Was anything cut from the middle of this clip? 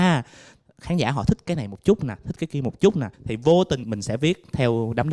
yes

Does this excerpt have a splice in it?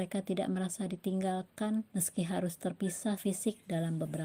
yes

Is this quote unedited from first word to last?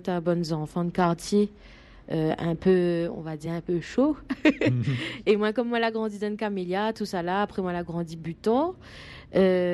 yes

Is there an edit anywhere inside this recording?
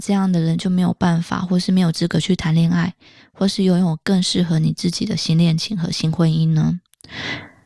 no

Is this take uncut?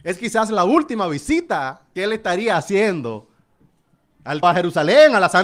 no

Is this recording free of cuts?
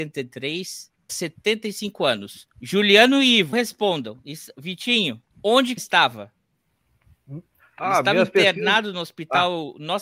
no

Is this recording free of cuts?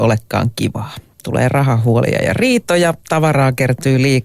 yes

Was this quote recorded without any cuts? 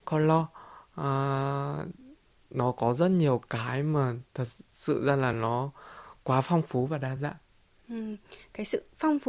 yes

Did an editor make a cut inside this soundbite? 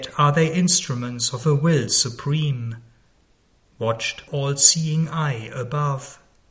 yes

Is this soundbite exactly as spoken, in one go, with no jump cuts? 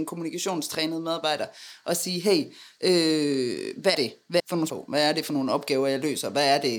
no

